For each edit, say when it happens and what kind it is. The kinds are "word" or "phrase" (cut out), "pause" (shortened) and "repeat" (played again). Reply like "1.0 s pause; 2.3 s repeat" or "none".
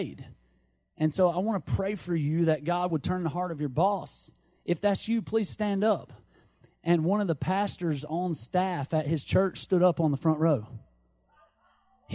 none